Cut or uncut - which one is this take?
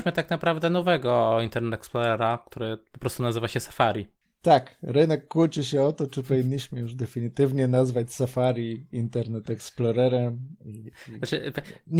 uncut